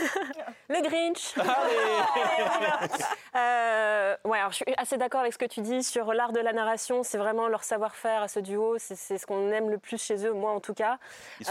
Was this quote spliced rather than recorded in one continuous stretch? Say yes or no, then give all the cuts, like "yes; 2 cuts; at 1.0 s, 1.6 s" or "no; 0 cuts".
no; 0 cuts